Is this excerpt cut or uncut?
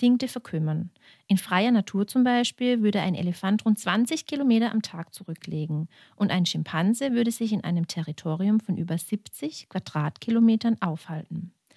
uncut